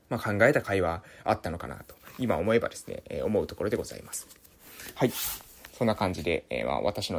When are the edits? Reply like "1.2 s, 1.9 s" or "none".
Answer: none